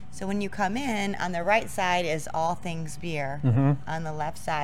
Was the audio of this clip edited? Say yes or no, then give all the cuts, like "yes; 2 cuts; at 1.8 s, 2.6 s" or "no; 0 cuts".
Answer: no; 0 cuts